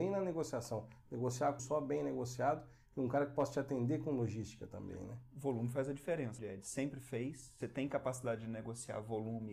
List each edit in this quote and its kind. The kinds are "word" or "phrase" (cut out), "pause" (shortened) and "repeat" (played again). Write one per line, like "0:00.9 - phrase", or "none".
0:01.6 - word
0:06.4 - word
0:07.6 - word